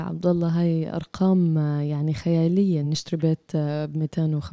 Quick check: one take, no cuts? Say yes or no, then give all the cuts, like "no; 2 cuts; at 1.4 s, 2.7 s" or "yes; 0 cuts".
yes; 0 cuts